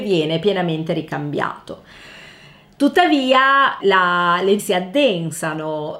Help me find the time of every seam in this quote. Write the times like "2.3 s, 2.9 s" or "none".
3.8 s, 4.6 s